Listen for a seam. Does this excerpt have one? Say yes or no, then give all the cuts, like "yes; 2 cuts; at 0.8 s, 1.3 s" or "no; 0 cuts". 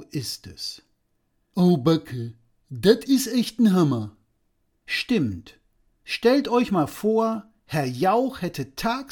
no; 0 cuts